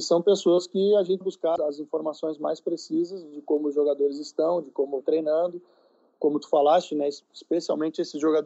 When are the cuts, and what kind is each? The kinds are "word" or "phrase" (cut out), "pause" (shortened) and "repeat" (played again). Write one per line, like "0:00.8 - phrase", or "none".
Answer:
0:01.2 - phrase
0:01.6 - word
0:05.0 - word
0:07.2 - pause